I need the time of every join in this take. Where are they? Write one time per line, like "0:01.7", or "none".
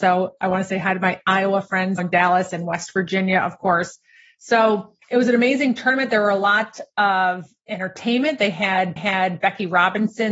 0:02.0
0:05.0
0:09.0